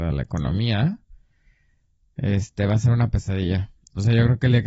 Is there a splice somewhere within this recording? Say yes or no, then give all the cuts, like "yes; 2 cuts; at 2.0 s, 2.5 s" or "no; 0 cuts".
no; 0 cuts